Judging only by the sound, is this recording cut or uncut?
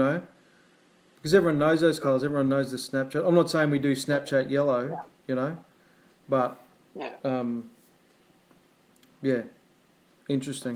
uncut